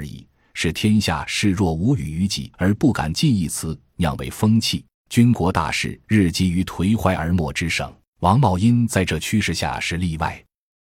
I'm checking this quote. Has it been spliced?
yes; 4 cuts; at 2.5 s, 4.9 s, 6.0 s, 8.1 s

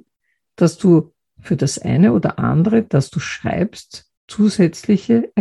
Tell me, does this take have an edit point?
yes; 1 cut; at 4.2 s

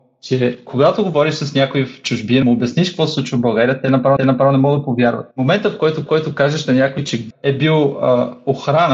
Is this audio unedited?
no; 5 cuts; at 2.4 s, 4.2 s, 5.3 s, 6.1 s, 7.3 s

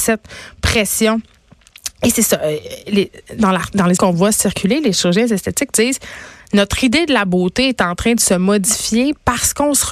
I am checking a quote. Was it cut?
yes; 1 cut; at 4.0 s

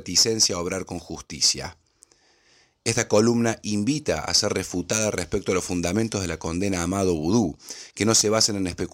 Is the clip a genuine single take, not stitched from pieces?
yes; 0 cuts

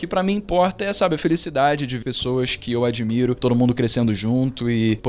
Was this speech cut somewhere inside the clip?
yes; 1 cut; at 2.0 s

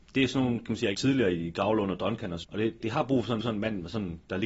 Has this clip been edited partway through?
yes; 4 cuts; at 0.9 s, 2.4 s, 2.8 s, 3.4 s

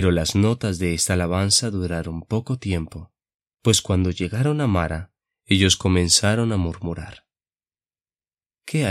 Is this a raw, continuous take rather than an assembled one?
yes; 0 cuts

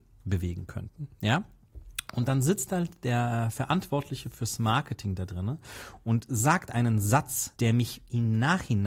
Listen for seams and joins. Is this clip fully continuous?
no; 1 cut; at 7.6 s

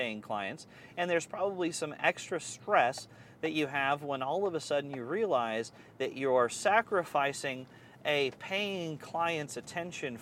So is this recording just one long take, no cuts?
yes; 0 cuts

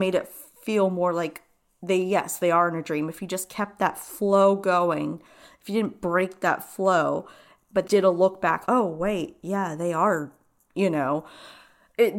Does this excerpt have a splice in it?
yes; 2 cuts; at 7.9 s, 8.7 s

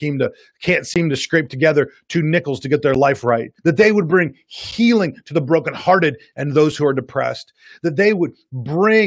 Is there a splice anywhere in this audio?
yes; 1 cut; at 3.6 s

